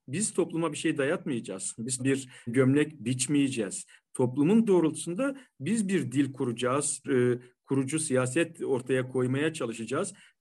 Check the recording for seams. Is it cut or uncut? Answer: cut